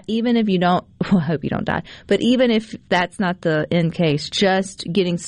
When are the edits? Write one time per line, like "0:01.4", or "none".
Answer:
none